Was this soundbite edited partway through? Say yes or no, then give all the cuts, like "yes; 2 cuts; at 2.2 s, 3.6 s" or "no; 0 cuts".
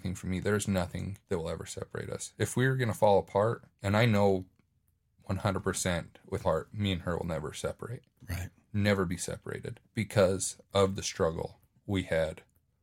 yes; 4 cuts; at 1.2 s, 3.7 s, 6.4 s, 9.8 s